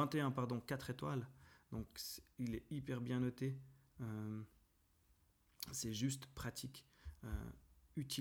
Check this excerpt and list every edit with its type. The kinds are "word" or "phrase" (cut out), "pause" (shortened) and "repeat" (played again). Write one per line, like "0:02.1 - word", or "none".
none